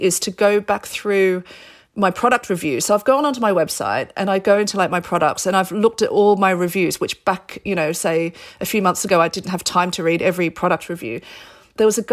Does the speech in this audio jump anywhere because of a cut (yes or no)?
no